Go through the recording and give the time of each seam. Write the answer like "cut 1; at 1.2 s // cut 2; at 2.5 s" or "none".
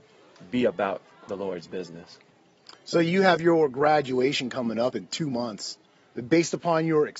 none